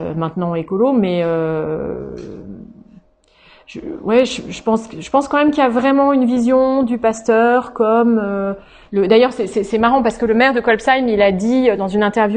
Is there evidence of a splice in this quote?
no; 0 cuts

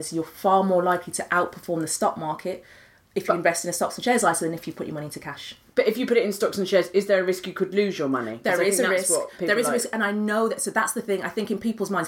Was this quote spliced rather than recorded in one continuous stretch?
no; 0 cuts

